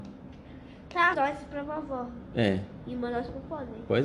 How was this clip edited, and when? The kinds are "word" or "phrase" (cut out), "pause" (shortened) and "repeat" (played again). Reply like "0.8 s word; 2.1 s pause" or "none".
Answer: 1.1 s phrase

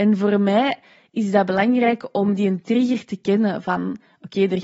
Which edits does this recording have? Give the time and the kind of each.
none

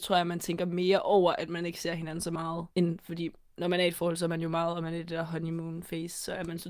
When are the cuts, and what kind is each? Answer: 2.7 s pause

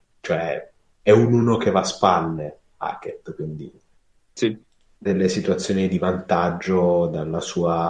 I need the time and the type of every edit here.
5.1 s word

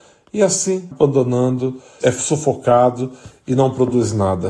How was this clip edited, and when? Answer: 0.9 s word; 2.0 s word

